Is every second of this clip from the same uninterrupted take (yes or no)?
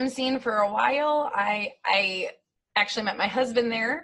yes